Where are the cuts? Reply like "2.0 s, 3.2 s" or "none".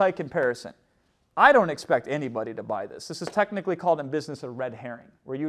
none